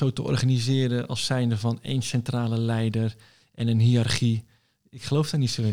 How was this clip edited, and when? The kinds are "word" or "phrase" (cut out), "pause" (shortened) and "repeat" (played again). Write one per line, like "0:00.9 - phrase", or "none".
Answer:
none